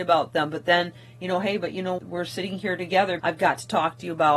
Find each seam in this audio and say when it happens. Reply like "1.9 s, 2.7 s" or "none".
2.0 s, 3.2 s